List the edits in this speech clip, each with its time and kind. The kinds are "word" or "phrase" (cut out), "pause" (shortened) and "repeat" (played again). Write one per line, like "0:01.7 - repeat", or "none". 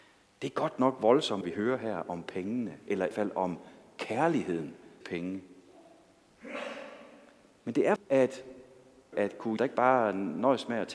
0:01.4 - word
0:03.1 - word
0:05.0 - word
0:08.0 - word
0:09.1 - phrase
0:09.6 - word